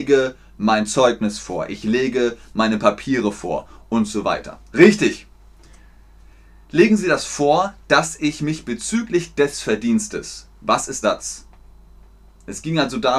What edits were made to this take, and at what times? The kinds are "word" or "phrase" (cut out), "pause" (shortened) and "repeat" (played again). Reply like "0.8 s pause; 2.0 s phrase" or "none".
11.0 s phrase